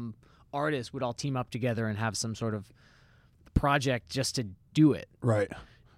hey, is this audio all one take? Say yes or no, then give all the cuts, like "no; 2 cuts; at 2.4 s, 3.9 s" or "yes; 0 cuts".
yes; 0 cuts